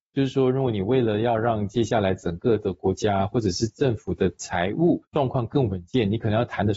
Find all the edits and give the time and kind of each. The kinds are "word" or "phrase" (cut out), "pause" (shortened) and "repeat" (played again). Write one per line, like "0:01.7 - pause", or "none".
0:05.1 - pause